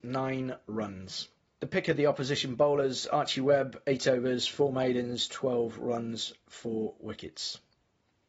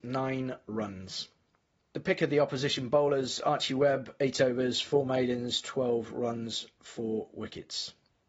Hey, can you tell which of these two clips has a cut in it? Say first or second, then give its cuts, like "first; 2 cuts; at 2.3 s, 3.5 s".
first; 1 cut; at 1.4 s